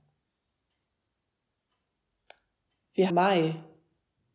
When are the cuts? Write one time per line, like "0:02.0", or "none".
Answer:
0:03.1